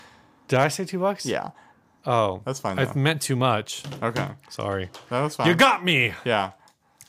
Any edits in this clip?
no; 0 cuts

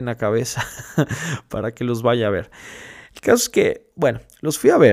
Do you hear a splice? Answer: no; 0 cuts

